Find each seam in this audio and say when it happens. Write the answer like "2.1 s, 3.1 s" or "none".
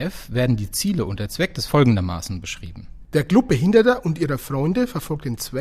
1.7 s